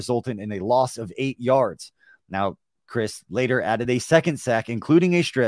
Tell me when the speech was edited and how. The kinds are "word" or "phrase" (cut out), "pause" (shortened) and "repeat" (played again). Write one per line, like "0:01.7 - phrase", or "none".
none

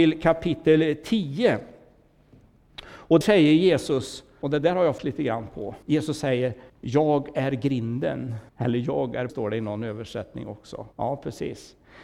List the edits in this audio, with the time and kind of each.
0:03.2 - word
0:04.4 - word
0:05.0 - word
0:05.8 - pause
0:06.7 - pause
0:08.5 - pause
0:09.3 - word
0:10.9 - pause

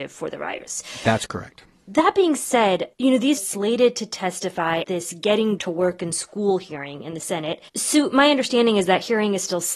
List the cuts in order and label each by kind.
0:02.9 - pause
0:03.4 - phrase
0:04.8 - word
0:05.6 - word
0:07.7 - pause

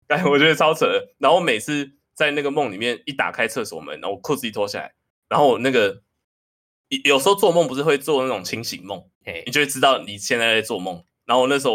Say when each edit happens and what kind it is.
0:05.1 - pause
0:09.1 - pause

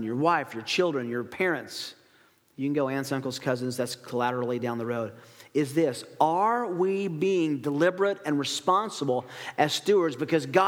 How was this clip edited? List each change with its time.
none

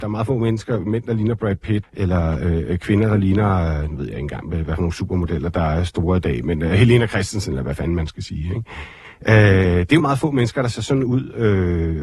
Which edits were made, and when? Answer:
0:01.8 - word
0:04.5 - word
0:10.0 - word

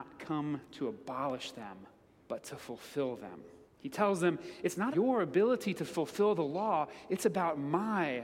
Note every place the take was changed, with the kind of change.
0:02.1 - pause
0:03.7 - pause
0:04.9 - word

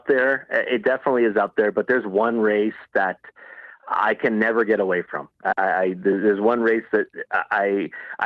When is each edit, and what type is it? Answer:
0:05.3 - pause

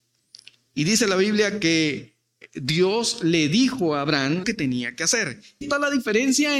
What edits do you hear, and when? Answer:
0:04.4 - word
0:05.6 - word

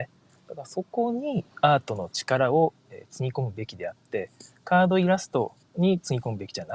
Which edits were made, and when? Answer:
0:01.5 - pause
0:05.6 - pause

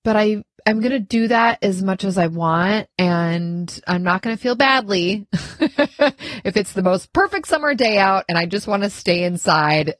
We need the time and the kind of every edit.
0:02.9 - pause

